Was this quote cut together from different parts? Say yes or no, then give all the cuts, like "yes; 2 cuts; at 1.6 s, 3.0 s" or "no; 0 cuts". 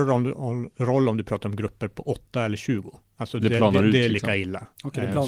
no; 0 cuts